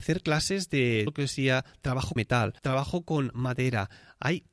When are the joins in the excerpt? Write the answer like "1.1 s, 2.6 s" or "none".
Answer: 1.1 s, 2.2 s, 2.6 s